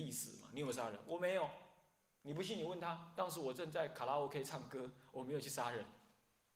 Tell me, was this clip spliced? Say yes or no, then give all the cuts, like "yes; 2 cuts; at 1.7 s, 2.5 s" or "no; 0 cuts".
no; 0 cuts